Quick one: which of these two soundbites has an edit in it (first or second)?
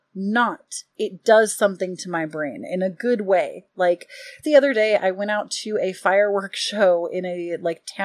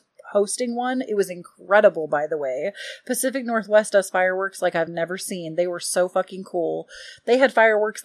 first